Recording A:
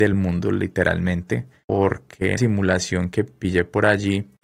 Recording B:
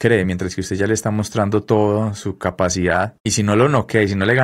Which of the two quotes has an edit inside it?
A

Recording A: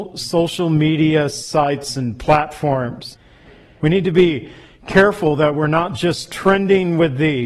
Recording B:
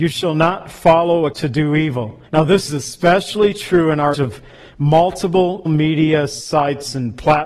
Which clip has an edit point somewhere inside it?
B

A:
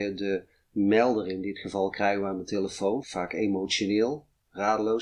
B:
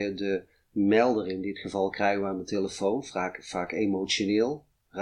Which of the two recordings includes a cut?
A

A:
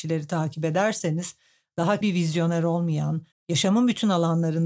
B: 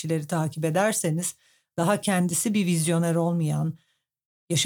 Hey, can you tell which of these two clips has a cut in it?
A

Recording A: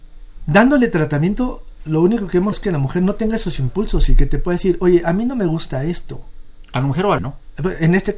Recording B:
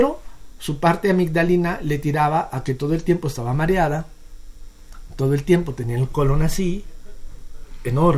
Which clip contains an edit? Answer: A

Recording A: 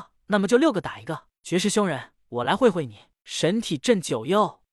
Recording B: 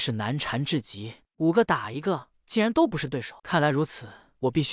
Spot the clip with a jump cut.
B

